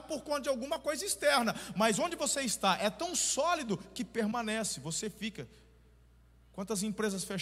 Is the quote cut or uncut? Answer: uncut